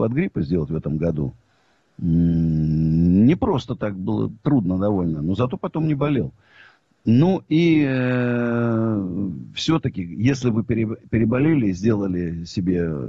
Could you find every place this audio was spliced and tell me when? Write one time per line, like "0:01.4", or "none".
none